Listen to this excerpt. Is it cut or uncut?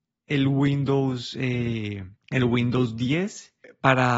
cut